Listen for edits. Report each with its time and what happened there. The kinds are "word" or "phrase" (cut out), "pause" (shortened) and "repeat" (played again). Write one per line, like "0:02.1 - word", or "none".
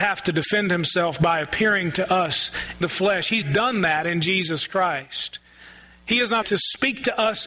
0:02.8 - word
0:03.4 - word
0:06.4 - word